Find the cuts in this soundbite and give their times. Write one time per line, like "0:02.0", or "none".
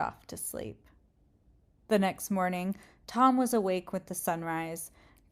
none